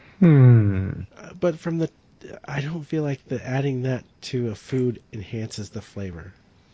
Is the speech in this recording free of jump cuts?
yes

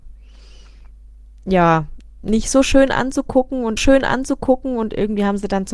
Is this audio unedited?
no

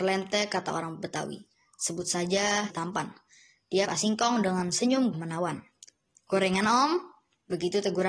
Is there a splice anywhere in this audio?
yes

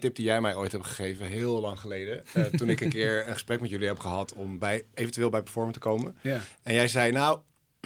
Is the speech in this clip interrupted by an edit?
no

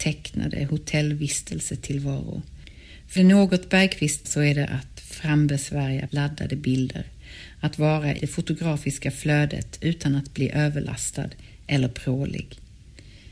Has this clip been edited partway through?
yes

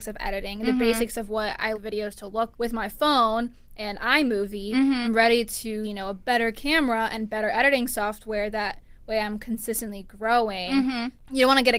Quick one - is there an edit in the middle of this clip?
yes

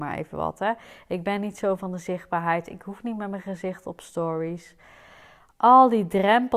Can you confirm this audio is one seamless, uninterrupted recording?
yes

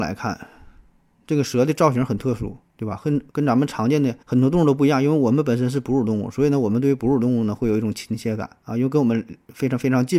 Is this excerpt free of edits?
no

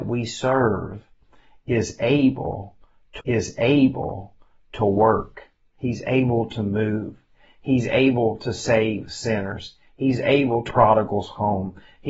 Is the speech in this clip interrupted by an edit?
yes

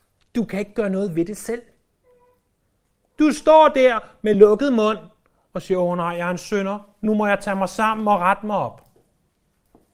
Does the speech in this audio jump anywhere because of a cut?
no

